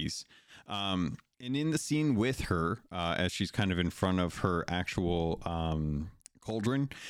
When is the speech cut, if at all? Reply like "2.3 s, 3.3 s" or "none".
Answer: none